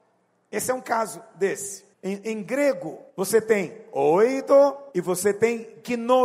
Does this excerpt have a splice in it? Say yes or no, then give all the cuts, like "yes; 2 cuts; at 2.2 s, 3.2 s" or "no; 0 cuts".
yes; 3 cuts; at 1.9 s, 3.1 s, 4.9 s